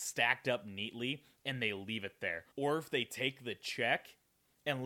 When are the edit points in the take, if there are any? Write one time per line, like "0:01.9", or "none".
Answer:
0:02.5